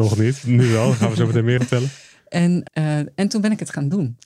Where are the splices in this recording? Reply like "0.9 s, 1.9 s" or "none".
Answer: 1.6 s, 2.7 s